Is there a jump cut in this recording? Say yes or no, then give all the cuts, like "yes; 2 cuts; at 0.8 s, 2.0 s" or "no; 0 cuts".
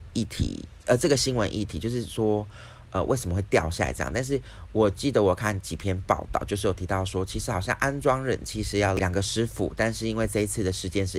no; 0 cuts